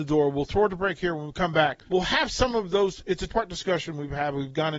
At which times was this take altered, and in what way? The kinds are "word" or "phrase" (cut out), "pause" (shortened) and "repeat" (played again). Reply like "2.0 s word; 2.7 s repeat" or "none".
1.9 s pause; 3.3 s word